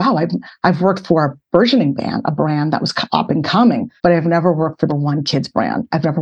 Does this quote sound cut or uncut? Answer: cut